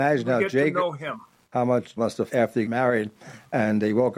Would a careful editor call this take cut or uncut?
cut